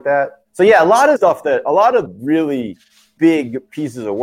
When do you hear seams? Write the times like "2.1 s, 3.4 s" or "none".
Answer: 1.2 s, 2.1 s, 3.2 s